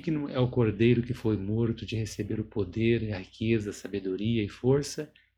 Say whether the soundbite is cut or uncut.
uncut